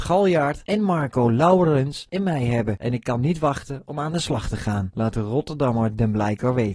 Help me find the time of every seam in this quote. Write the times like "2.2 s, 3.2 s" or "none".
none

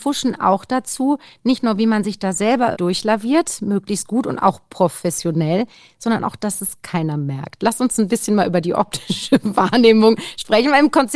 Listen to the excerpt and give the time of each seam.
2.7 s

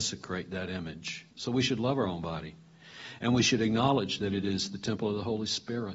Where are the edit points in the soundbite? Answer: 1.3 s

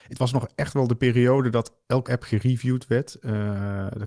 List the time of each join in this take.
2.0 s

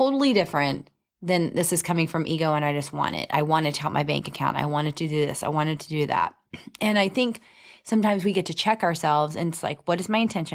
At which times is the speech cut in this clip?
none

